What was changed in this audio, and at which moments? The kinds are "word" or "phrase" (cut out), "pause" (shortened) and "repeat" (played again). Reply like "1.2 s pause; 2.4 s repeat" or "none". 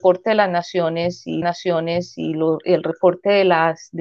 1.4 s repeat